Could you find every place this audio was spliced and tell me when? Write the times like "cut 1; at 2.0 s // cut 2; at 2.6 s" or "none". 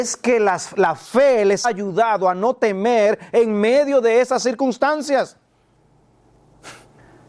cut 1; at 1.6 s